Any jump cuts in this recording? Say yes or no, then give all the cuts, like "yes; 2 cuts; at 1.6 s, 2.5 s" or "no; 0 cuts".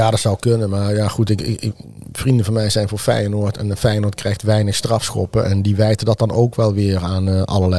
no; 0 cuts